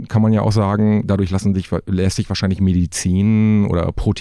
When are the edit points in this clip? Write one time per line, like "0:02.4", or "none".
none